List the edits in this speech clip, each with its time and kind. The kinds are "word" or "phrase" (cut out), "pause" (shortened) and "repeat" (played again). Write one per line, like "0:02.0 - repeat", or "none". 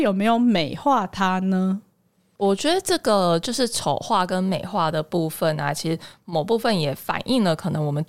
none